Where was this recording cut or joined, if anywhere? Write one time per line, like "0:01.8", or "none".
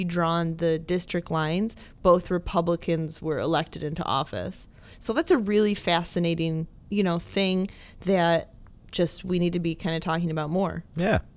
none

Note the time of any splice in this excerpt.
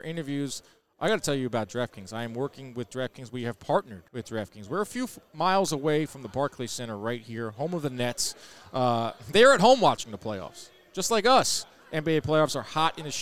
0:04.1

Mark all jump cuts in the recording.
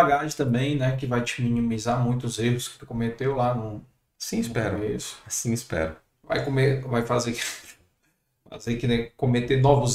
none

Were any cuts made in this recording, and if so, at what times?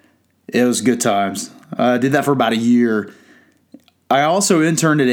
none

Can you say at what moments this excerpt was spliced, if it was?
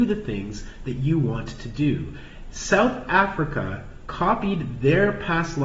none

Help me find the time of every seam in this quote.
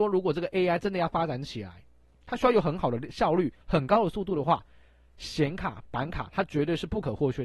0:03.6

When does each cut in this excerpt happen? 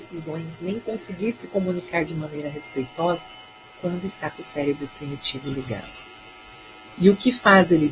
none

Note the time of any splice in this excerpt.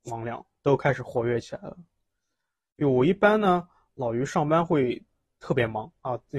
none

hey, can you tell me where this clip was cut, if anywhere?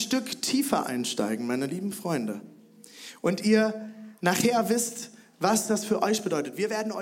none

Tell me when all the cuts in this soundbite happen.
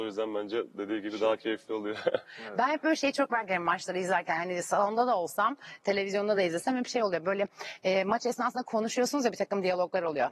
none

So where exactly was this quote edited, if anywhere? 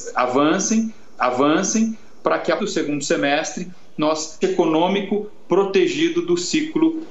0:01.2
0:02.6
0:04.4

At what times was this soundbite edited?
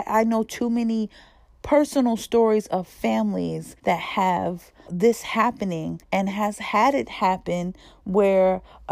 0:03.8
0:04.9
0:06.0

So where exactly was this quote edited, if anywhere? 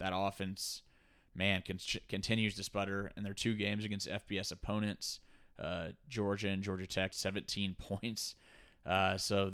0:07.1

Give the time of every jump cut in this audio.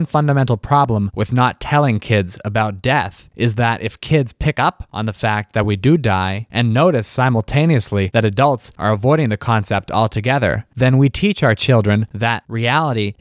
none

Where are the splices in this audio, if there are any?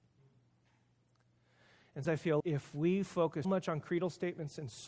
0:02.0
0:02.4
0:03.4

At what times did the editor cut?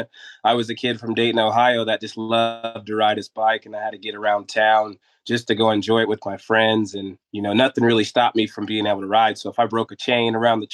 none

